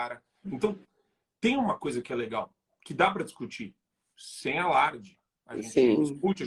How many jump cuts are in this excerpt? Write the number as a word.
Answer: zero